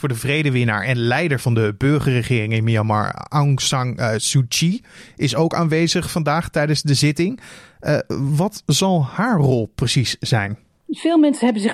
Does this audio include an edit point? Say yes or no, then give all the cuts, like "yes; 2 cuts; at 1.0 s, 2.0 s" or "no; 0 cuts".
no; 0 cuts